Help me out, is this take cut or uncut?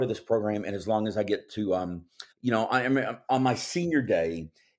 cut